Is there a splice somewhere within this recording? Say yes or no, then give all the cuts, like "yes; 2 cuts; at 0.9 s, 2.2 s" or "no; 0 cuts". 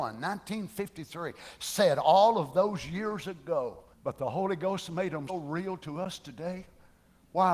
yes; 2 cuts; at 3.9 s, 5.3 s